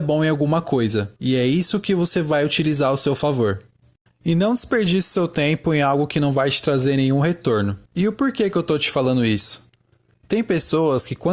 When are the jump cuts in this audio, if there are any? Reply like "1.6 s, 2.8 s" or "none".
1.2 s, 7.9 s